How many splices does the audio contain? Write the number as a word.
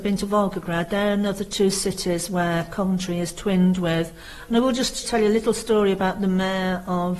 one